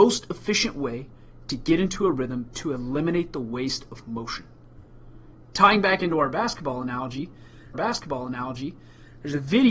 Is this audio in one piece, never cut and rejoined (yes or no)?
no